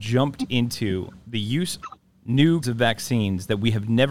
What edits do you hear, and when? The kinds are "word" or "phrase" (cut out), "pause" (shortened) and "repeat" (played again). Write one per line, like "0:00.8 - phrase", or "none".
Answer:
0:01.8 - word
0:02.6 - word